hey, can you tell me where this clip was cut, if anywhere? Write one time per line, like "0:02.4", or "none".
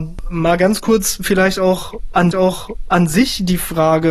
0:02.3